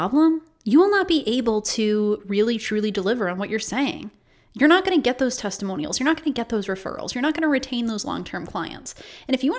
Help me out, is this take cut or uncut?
uncut